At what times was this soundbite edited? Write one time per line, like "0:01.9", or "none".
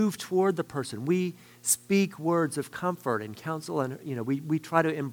none